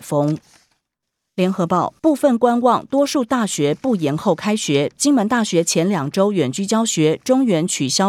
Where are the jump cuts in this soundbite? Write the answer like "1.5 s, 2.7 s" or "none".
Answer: 1.0 s, 2.0 s